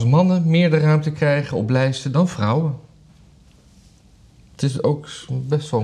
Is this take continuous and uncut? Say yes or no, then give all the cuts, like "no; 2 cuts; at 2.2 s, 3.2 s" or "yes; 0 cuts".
yes; 0 cuts